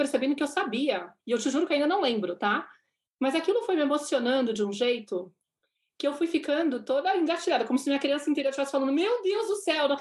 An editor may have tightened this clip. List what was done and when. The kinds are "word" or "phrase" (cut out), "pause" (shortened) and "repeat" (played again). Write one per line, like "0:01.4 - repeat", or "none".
0:01.2 - pause